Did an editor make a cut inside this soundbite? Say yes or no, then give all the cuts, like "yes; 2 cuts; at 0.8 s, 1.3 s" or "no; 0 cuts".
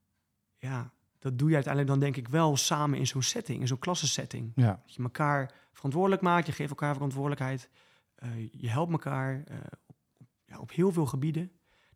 no; 0 cuts